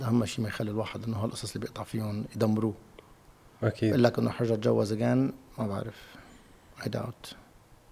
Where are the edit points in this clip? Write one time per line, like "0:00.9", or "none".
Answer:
none